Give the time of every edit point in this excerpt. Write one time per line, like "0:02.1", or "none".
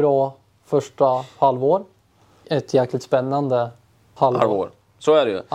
0:02.4
0:04.2